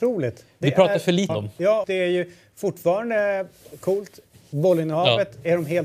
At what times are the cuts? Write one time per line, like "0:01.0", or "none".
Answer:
0:01.3
0:01.8